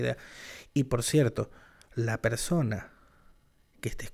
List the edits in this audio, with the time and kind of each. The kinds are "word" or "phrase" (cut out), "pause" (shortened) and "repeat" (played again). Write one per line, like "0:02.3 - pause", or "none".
none